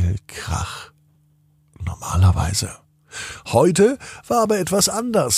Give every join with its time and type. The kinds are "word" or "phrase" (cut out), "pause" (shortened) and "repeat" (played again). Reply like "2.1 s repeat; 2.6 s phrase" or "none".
none